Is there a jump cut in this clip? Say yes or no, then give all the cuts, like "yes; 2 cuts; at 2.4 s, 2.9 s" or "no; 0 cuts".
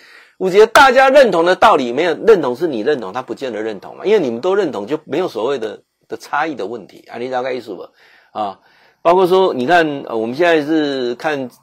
no; 0 cuts